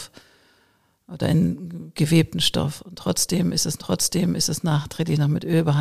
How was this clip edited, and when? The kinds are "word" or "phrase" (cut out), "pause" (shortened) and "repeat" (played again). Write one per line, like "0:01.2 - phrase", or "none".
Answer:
0:03.8 - repeat